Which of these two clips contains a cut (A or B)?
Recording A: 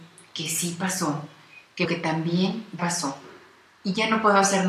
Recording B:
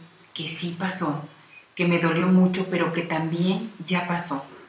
A